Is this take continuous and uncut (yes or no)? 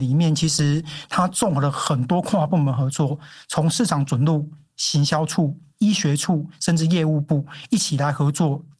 yes